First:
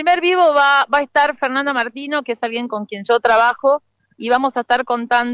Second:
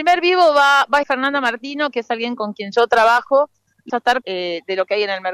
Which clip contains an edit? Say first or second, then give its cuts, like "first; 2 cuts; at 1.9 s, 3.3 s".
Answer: second; 3 cuts; at 1.0 s, 3.9 s, 4.2 s